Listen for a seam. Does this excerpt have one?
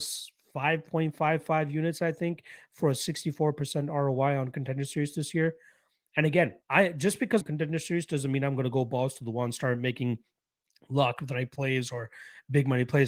yes; 2 cuts; at 6.6 s, 7.4 s

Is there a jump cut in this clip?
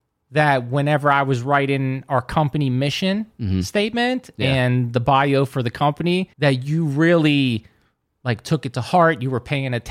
yes; 1 cut; at 6.3 s

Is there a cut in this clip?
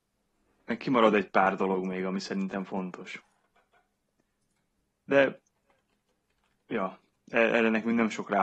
no; 0 cuts

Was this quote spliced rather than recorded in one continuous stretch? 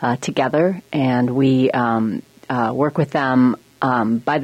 no; 0 cuts

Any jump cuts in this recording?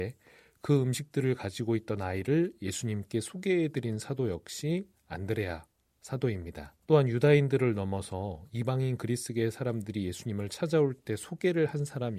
yes; 1 cut; at 6.8 s

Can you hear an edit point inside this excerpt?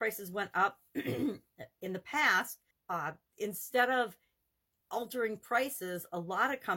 yes; 1 cut; at 2.7 s

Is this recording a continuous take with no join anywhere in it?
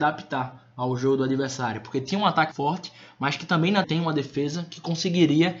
no; 2 cuts; at 2.5 s, 3.8 s

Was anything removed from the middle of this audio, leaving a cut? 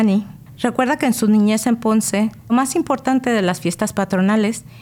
yes; 1 cut; at 2.5 s

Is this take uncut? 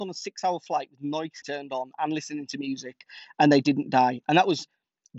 no; 1 cut; at 1.4 s

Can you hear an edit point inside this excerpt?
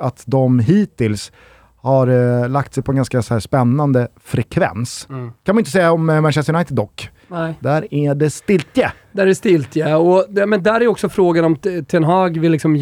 no; 0 cuts

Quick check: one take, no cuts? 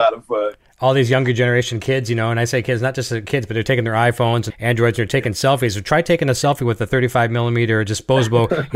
no; 1 cut; at 4.5 s

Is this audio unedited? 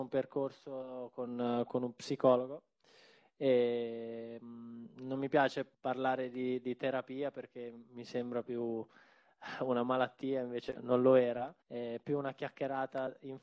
no; 3 cuts; at 5.7 s, 10.8 s, 11.6 s

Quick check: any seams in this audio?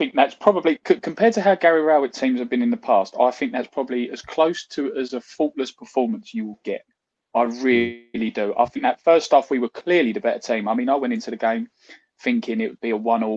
no; 0 cuts

